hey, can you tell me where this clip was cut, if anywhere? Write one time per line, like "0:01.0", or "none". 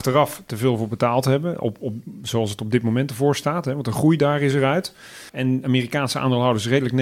0:05.3